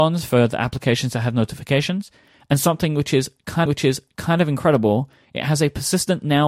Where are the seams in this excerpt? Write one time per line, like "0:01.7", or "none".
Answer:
0:03.7